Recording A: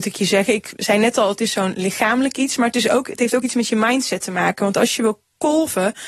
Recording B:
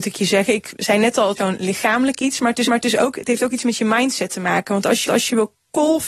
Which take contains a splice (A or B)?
B